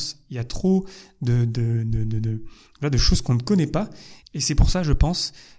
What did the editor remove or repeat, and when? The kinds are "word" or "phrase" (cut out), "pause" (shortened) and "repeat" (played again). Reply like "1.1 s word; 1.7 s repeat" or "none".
4.2 s pause